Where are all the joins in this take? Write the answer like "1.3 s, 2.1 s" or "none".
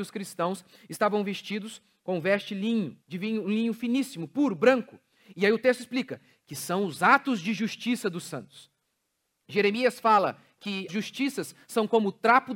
3.0 s, 10.9 s